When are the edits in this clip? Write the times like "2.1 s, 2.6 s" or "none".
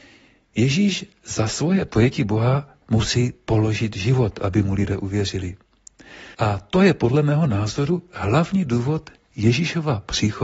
2.8 s, 6.3 s

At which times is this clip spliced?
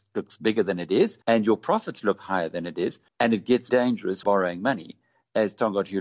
1.2 s, 3.1 s, 3.7 s, 4.2 s

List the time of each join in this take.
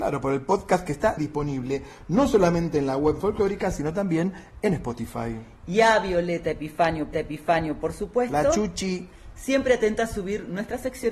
1.2 s, 3.2 s, 7.1 s

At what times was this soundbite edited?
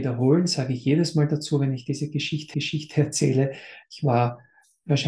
2.5 s

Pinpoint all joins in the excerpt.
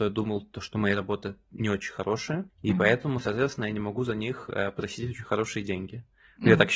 2.5 s

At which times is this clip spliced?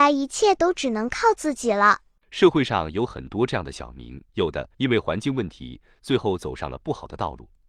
2.2 s, 4.3 s, 4.7 s

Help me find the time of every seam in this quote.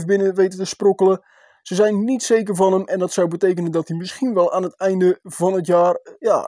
none

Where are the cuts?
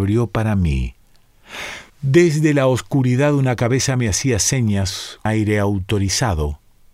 1.9 s, 5.3 s

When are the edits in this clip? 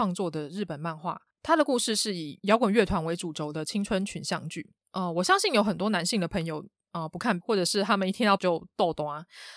7.4 s, 8.4 s

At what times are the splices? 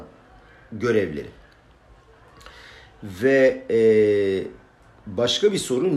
none

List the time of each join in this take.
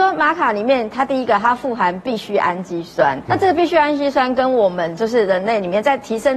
3.3 s

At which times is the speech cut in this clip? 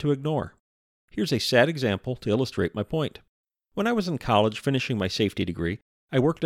3.4 s

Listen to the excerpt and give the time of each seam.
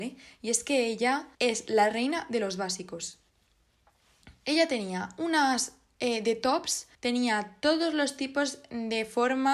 1.3 s, 6.9 s

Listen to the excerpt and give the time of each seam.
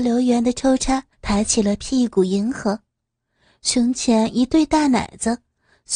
1.1 s

